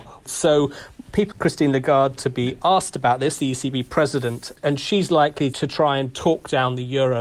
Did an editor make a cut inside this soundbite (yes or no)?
yes